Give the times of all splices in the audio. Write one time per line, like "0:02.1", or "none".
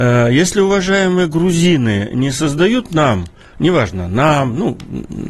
none

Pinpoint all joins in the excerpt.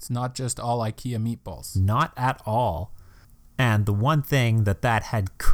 none

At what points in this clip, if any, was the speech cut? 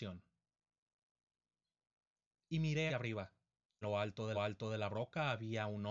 0:02.9
0:03.8
0:04.3

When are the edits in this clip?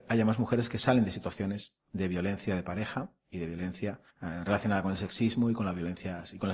0:01.9
0:04.1

